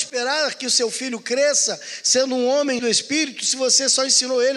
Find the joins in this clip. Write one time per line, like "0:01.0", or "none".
0:02.8